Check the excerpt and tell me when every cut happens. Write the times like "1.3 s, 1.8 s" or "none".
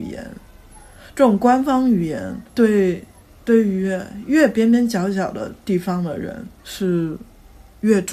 2.5 s, 6.6 s